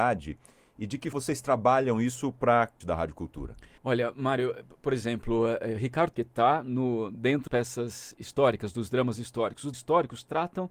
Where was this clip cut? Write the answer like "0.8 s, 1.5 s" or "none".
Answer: 1.1 s, 2.8 s, 3.8 s, 6.1 s, 7.5 s, 9.7 s